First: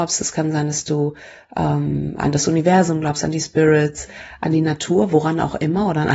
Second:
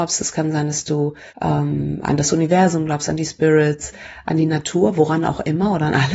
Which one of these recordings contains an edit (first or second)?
second